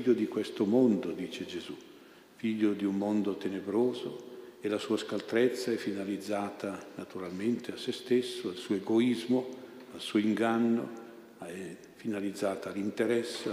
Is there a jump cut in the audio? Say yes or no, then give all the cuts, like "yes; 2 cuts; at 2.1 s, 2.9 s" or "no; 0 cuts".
no; 0 cuts